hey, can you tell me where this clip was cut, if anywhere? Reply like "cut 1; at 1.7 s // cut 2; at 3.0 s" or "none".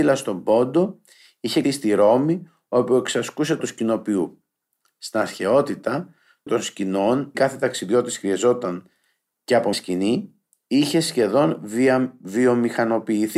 cut 1; at 1.6 s // cut 2; at 3.6 s // cut 3; at 6.5 s // cut 4; at 7.3 s // cut 5; at 9.7 s

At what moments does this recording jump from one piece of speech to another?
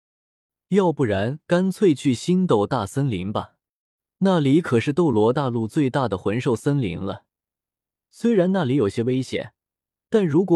none

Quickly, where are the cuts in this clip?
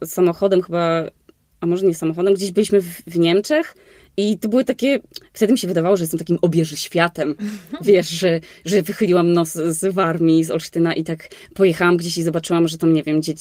none

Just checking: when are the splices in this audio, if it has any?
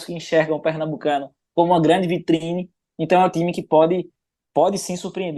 none

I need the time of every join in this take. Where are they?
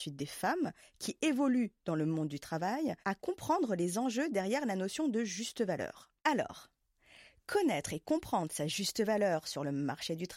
cut 1; at 3.0 s // cut 2; at 6.2 s

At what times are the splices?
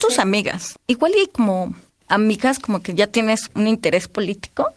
cut 1; at 3.5 s

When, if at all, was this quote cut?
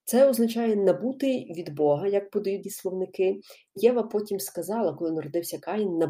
cut 1; at 2.6 s // cut 2; at 3.8 s

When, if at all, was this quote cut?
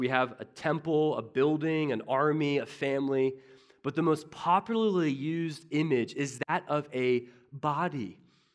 none

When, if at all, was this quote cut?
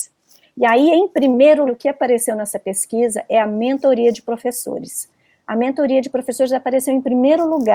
cut 1; at 1.7 s

